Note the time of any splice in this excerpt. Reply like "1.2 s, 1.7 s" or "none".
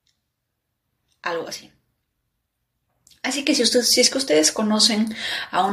none